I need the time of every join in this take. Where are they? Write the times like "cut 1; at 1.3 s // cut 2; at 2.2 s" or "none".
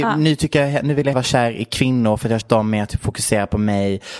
cut 1; at 1.1 s // cut 2; at 2.4 s